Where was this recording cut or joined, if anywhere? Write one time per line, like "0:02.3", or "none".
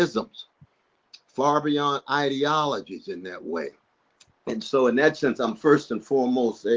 none